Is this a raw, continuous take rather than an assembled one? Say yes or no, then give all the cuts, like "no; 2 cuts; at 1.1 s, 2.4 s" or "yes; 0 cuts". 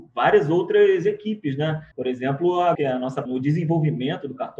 no; 3 cuts; at 1.9 s, 2.7 s, 3.3 s